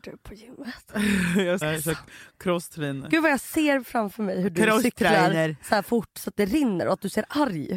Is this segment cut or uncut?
cut